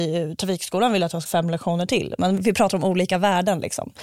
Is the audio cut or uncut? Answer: cut